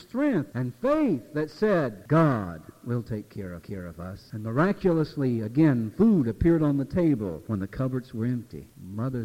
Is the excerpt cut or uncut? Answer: cut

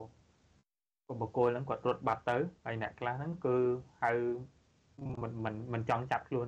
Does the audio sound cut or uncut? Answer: cut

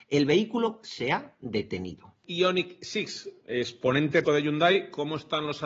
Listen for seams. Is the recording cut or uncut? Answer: cut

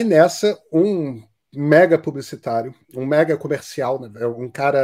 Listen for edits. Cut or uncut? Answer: cut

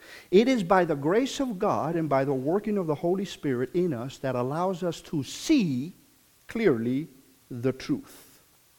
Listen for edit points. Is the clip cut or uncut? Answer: uncut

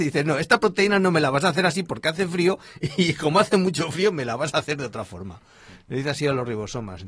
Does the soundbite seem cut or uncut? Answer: uncut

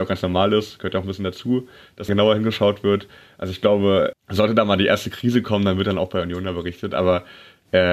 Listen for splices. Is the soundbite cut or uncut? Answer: cut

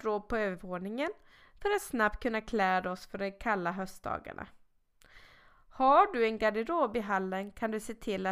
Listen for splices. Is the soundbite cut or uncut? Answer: uncut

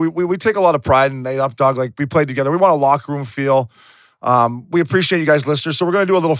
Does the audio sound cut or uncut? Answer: uncut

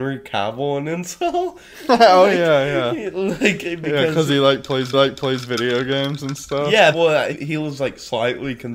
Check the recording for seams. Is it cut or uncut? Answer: cut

